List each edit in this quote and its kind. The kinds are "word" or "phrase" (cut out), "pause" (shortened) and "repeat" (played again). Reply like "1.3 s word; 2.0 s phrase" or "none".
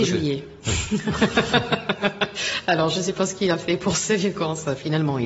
none